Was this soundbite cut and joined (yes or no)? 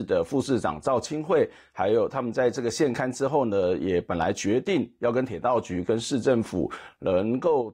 no